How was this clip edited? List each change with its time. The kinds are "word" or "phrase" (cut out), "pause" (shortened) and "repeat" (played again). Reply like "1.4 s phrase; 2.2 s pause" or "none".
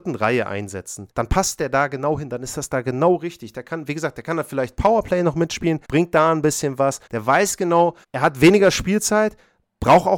1.1 s pause; 5.8 s pause; 7.1 s pause; 8.0 s pause